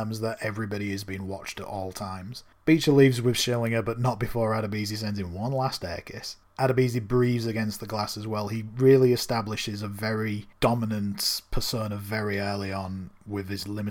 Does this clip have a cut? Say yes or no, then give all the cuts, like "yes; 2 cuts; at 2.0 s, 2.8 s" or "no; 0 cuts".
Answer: no; 0 cuts